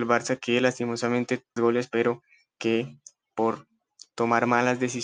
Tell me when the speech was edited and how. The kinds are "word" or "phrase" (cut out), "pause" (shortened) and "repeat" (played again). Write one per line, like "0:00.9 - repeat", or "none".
0:01.6 - phrase